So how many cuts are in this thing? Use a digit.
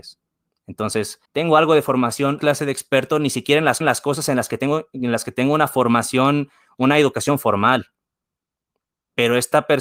3